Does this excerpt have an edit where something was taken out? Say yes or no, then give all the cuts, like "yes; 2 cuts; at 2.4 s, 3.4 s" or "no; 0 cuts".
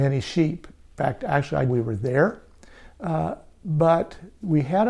yes; 1 cut; at 1.7 s